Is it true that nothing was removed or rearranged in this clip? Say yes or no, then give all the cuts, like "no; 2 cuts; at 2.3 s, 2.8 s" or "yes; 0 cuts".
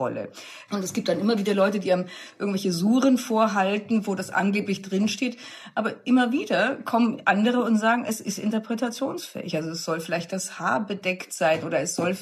yes; 0 cuts